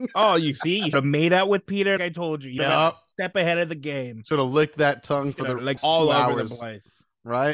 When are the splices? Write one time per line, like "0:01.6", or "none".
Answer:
0:00.9
0:02.0
0:02.6
0:05.8